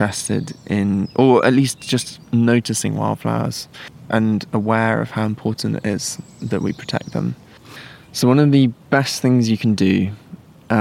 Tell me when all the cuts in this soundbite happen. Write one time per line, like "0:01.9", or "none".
0:06.3